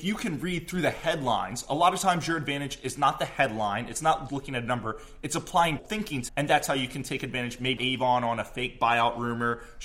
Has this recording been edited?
yes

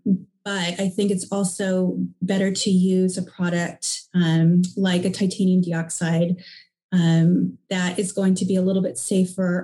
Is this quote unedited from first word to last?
yes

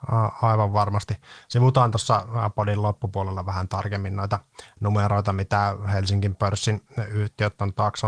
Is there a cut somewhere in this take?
no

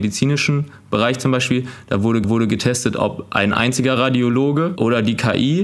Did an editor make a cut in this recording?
yes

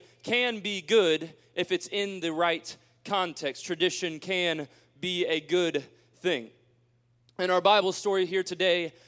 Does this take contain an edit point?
no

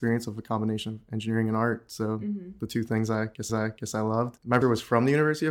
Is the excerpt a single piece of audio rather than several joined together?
no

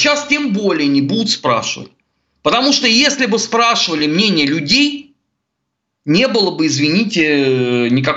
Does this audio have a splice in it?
no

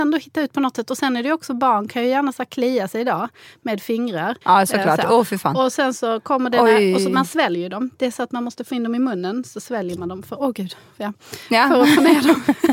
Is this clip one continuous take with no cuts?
no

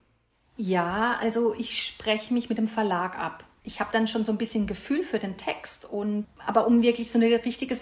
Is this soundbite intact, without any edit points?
yes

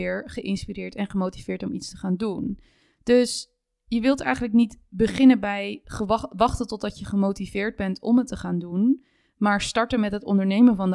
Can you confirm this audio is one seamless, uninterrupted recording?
yes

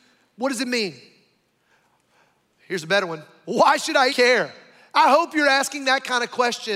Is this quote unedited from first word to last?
no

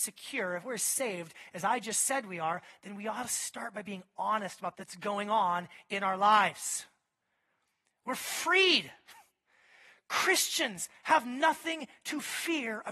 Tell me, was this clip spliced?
yes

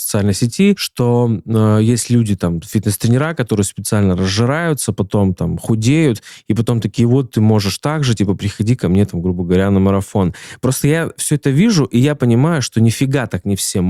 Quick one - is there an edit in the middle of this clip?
no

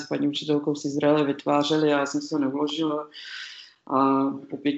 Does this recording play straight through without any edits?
yes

